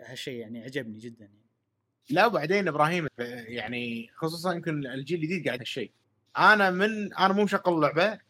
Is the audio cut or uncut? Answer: cut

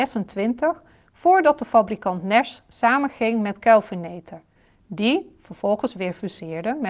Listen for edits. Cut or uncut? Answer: uncut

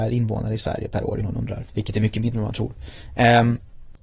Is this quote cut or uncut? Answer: cut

